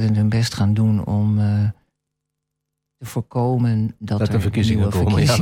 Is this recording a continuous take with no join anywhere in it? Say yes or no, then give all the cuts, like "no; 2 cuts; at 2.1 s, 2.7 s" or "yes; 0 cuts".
yes; 0 cuts